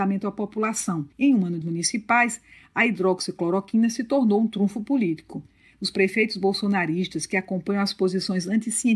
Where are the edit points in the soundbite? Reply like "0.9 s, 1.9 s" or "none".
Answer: 1.1 s, 1.6 s